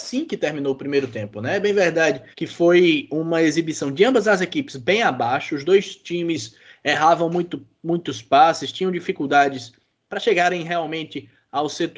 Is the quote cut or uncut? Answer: cut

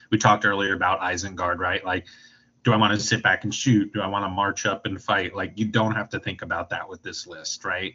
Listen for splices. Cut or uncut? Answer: uncut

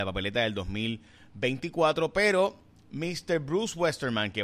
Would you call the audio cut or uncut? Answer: uncut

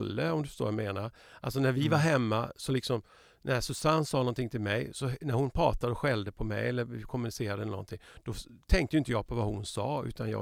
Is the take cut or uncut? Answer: uncut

